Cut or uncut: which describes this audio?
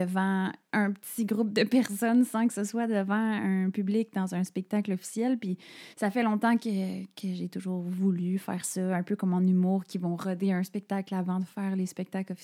cut